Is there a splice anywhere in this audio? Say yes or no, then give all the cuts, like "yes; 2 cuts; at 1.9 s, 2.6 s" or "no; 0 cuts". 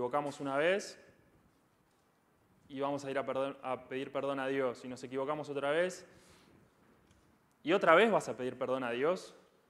no; 0 cuts